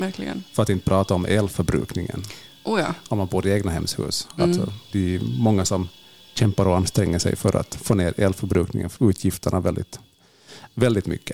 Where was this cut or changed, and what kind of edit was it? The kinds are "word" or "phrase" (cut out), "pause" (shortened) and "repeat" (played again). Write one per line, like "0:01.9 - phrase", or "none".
0:04.9 - word
0:09.0 - phrase